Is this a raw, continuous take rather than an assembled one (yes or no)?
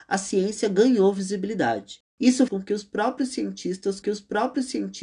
no